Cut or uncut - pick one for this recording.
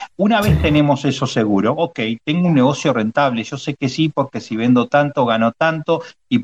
uncut